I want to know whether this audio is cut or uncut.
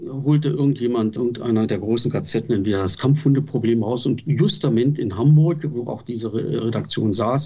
cut